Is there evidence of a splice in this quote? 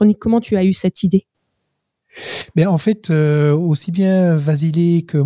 no; 0 cuts

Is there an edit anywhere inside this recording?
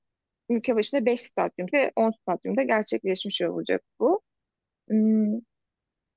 yes; 1 cut; at 1.7 s

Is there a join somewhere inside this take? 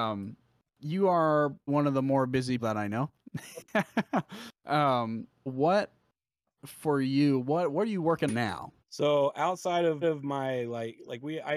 yes; 6 cuts; at 1.7 s, 2.6 s, 5.5 s, 8.3 s, 8.8 s, 10.0 s

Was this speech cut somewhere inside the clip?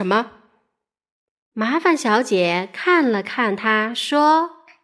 no; 0 cuts

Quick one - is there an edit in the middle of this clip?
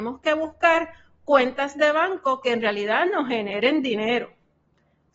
no; 0 cuts

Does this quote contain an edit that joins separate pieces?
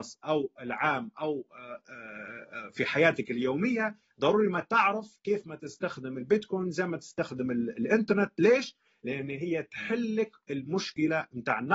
no; 0 cuts

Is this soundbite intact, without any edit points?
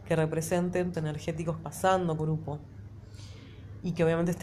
no; 3 cuts; at 0.9 s, 1.6 s, 2.2 s

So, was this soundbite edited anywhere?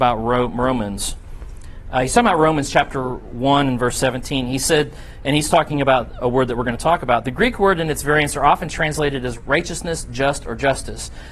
yes; 1 cut; at 9.3 s

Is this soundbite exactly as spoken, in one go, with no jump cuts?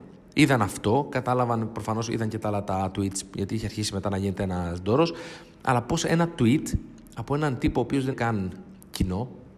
no; 1 cut; at 8.1 s

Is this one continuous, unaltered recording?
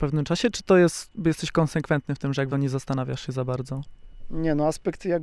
no; 1 cut; at 2.5 s

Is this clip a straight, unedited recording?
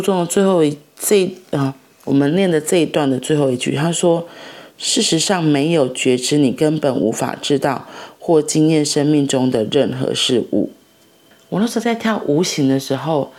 yes; 0 cuts

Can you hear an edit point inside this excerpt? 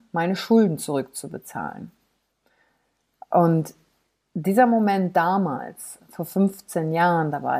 no; 0 cuts

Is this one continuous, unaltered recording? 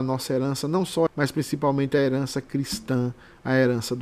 no; 1 cut; at 1.1 s

